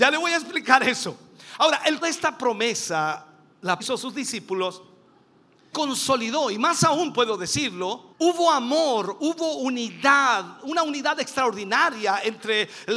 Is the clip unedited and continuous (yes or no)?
no